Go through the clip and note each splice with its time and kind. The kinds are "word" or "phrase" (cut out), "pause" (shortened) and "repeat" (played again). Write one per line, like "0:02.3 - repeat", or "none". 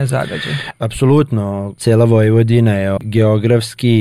none